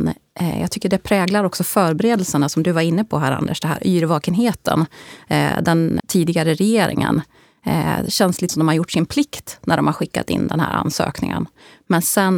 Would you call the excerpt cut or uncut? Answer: cut